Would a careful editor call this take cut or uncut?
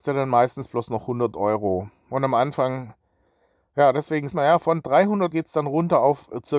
cut